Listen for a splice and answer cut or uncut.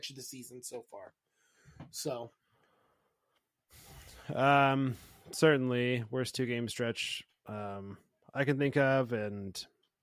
uncut